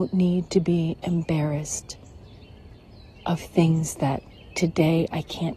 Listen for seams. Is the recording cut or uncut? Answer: uncut